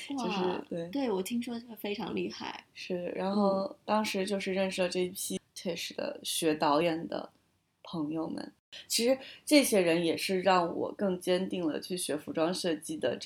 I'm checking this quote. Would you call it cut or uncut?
uncut